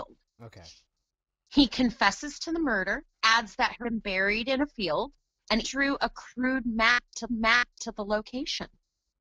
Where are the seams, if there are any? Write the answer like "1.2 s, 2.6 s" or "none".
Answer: 3.1 s, 3.8 s, 5.6 s, 7.3 s